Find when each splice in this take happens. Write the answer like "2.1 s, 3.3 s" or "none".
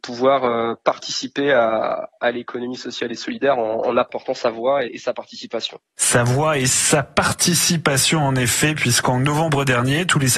4.9 s, 5.9 s